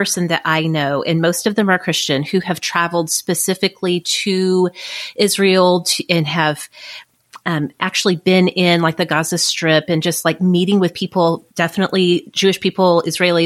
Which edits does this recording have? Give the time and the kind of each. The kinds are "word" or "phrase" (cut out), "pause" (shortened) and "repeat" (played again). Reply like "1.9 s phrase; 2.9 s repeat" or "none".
11.5 s pause

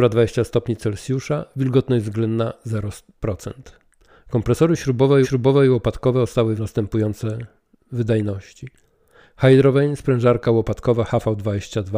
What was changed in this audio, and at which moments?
5.2 s repeat; 6.6 s phrase

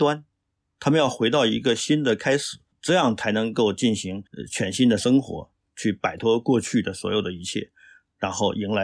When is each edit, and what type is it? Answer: 4.3 s pause

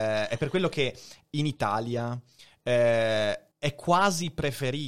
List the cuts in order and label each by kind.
3.5 s pause

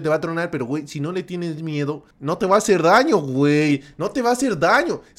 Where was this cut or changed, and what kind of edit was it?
2.1 s pause

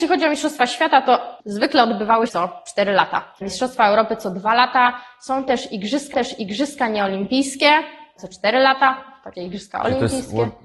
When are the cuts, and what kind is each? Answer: 2.3 s word; 3.4 s pause; 6.1 s repeat; 9.3 s word

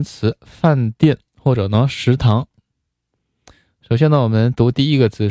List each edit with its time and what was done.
none

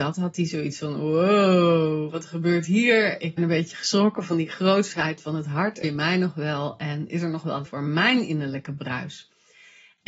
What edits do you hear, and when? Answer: 3.4 s word; 5.8 s word; 7.6 s word

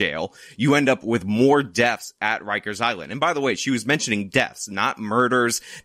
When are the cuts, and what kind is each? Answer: none

